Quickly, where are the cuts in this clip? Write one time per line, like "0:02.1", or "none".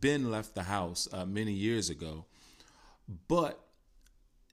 none